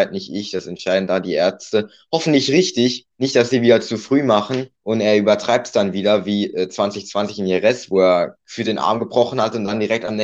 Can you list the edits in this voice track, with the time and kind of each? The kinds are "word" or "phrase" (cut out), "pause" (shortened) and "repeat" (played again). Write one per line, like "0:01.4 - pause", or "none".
0:03.1 - pause
0:04.8 - pause
0:08.4 - pause